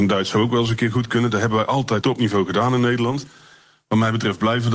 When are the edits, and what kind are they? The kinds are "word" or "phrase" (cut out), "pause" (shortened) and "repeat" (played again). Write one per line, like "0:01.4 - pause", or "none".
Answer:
0:02.0 - word